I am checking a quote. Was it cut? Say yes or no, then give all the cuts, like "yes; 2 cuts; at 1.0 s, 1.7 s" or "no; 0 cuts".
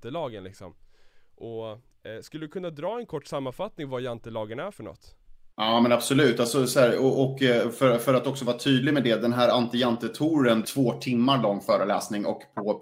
yes; 2 cuts; at 5.5 s, 10.6 s